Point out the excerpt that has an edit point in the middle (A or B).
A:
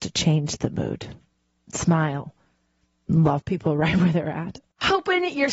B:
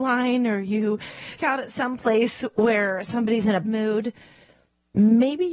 B